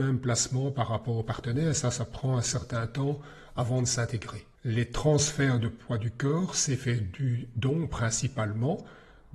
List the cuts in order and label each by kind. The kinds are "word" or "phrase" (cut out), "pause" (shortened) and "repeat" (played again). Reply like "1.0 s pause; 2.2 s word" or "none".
4.6 s pause